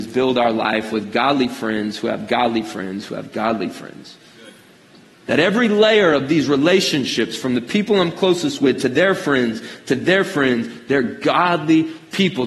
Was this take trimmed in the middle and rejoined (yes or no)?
no